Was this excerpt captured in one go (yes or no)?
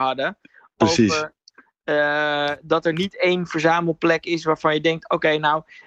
yes